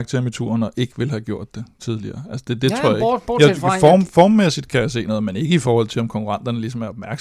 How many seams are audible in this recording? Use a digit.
0